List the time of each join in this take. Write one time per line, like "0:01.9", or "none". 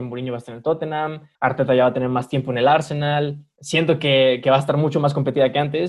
none